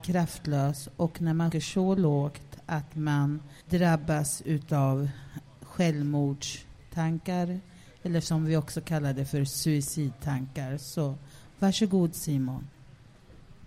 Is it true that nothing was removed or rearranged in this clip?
no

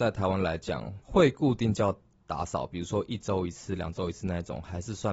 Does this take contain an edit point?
yes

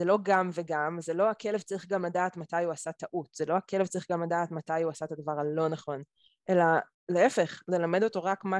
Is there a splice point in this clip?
yes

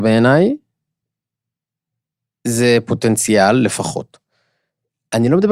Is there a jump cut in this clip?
no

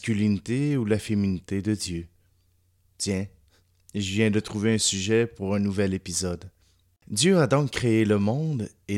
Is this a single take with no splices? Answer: yes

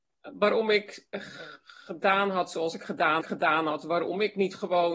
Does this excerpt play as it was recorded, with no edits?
no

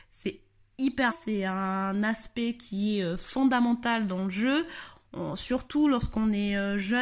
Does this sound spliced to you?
yes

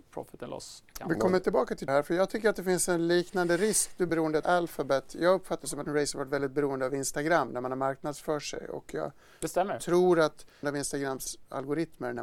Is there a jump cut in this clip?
yes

